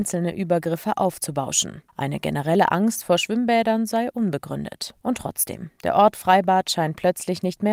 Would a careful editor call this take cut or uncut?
cut